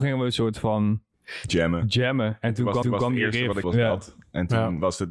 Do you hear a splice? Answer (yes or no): yes